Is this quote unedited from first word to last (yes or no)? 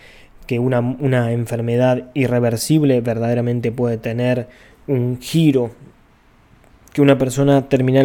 yes